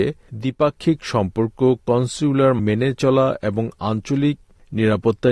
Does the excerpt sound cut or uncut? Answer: cut